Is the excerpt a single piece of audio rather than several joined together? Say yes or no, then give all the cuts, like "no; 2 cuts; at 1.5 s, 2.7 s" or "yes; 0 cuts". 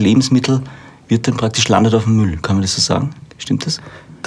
yes; 0 cuts